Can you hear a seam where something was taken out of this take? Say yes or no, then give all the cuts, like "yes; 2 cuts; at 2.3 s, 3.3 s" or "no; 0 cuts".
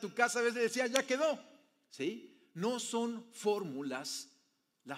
no; 0 cuts